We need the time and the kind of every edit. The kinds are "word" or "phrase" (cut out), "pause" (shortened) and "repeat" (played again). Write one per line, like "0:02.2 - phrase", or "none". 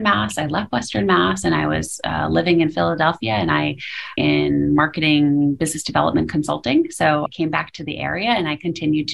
0:04.2 - phrase
0:07.3 - word